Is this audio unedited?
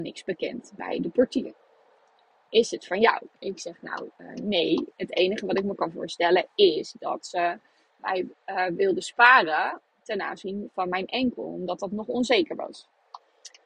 yes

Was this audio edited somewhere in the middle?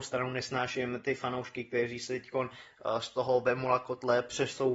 no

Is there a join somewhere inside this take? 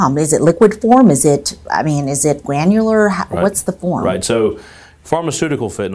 no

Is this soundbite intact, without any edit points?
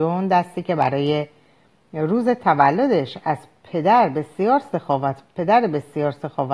yes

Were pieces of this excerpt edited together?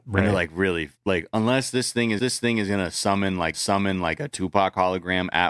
yes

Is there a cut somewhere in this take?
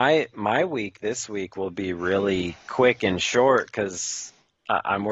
yes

